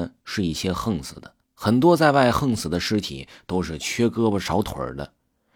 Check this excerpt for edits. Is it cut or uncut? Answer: cut